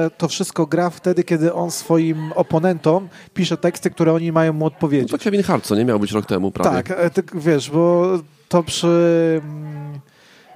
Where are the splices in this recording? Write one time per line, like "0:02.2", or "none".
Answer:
none